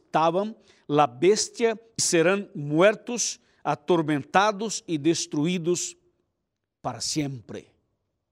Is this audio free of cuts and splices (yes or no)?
no